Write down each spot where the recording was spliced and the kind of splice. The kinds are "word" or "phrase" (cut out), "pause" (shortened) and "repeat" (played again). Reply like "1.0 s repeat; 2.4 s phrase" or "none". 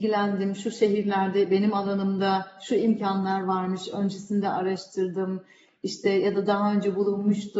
none